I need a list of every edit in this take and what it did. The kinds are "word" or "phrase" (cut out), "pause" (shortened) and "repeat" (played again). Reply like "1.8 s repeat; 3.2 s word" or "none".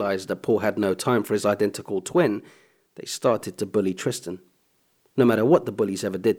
none